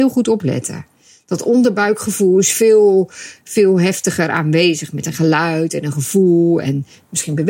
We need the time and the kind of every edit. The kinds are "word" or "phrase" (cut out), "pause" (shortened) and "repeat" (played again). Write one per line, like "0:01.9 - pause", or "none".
none